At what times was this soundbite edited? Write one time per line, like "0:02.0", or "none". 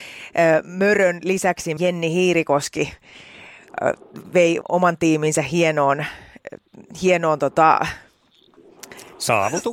0:01.8
0:04.6